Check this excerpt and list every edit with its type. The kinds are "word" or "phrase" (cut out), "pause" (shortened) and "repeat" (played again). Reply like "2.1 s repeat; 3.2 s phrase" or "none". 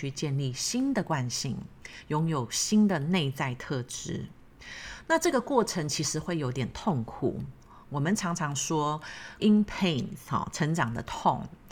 9.4 s word